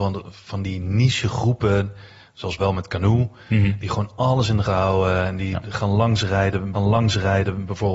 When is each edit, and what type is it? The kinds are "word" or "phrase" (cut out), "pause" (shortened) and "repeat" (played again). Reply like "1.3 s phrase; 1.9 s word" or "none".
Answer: 2.6 s word; 4.6 s word; 6.7 s repeat